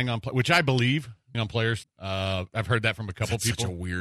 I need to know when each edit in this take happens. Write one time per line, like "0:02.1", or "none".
0:01.3
0:01.8
0:02.5